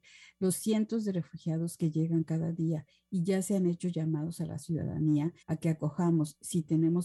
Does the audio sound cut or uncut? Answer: cut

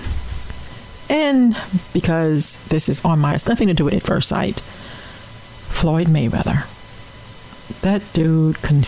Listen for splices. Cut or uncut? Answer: cut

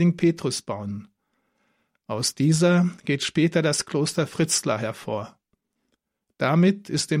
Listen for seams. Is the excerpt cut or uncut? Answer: uncut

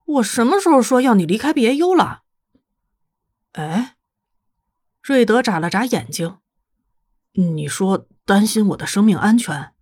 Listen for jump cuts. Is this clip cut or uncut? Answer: uncut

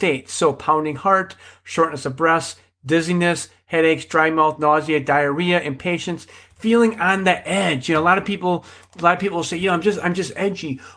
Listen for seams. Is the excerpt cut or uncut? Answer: uncut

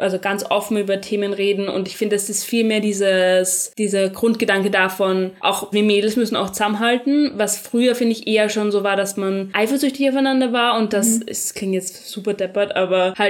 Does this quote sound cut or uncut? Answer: cut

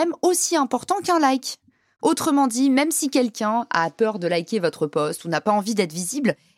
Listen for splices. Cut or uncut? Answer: uncut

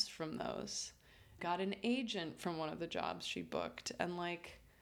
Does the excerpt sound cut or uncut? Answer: cut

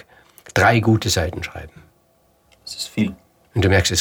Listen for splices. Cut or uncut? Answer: uncut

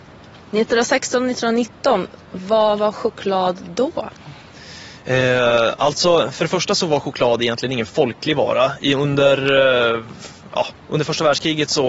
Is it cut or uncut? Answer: uncut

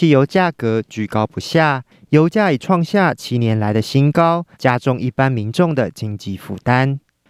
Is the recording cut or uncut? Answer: cut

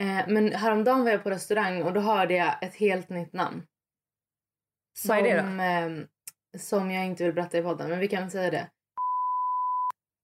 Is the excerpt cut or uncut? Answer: uncut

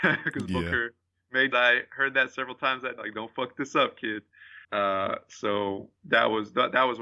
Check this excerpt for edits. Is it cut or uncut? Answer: cut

